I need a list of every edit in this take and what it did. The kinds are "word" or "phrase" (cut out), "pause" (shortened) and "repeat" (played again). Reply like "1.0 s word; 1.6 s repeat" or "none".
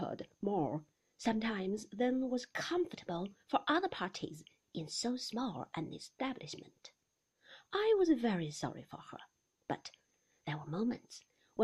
none